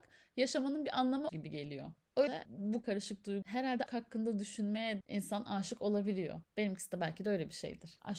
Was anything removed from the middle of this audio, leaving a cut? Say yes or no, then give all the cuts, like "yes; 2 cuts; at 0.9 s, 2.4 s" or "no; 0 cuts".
yes; 6 cuts; at 1.3 s, 2.3 s, 2.8 s, 3.4 s, 3.9 s, 5.0 s